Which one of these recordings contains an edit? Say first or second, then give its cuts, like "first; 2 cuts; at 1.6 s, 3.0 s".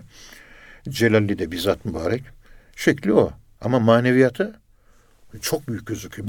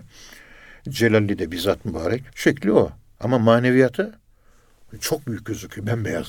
second; 1 cut; at 2.3 s